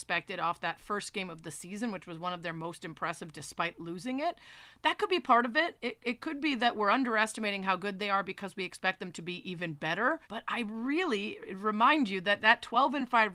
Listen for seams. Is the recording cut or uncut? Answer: cut